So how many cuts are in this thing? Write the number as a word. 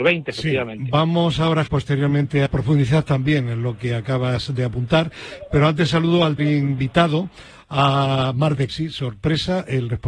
four